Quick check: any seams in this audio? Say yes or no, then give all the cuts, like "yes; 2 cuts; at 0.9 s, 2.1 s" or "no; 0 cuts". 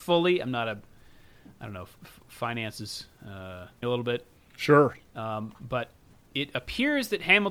yes; 1 cut; at 3.8 s